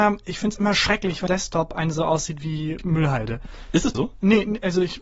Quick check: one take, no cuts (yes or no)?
no